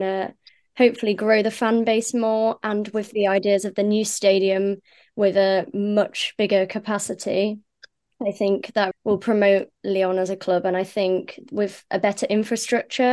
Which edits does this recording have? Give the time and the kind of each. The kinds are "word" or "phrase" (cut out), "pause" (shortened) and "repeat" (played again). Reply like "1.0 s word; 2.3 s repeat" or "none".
8.9 s word